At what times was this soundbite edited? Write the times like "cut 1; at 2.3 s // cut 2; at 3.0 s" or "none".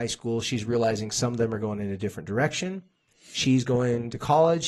none